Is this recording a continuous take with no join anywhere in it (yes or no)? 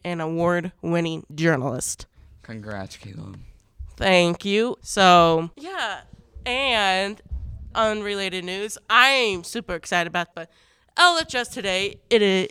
no